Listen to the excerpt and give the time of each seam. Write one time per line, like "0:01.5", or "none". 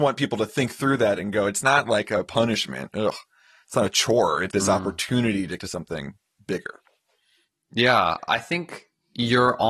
0:04.5
0:05.6
0:08.2